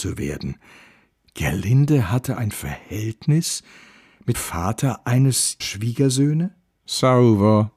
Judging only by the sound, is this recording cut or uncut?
cut